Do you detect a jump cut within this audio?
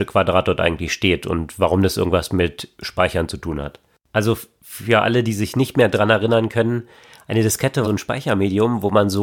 yes; 1 cut; at 7.8 s

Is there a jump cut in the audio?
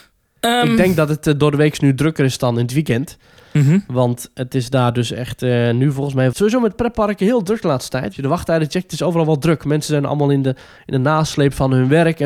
no; 0 cuts

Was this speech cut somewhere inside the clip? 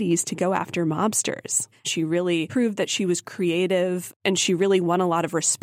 yes; 1 cut; at 1.8 s

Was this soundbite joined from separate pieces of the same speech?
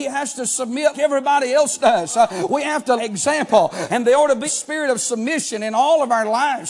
yes; 3 cuts; at 0.9 s, 3.0 s, 4.5 s

